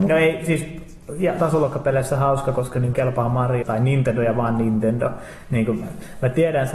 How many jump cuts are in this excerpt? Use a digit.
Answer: 3